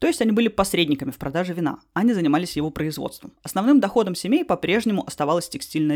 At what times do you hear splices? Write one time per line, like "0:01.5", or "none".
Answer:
0:03.4